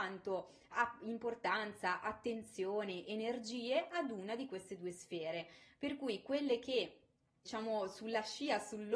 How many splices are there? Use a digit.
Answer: 0